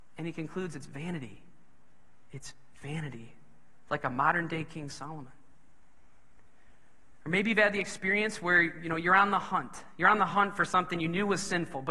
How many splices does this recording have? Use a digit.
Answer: 0